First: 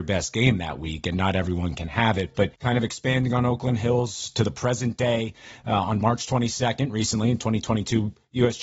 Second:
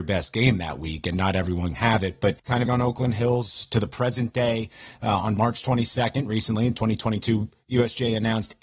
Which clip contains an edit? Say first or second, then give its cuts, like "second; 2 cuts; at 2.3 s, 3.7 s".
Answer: second; 2 cuts; at 1.7 s, 2.7 s